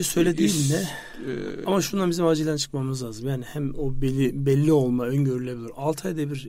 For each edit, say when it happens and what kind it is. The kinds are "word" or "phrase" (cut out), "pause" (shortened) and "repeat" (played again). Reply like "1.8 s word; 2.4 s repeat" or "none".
none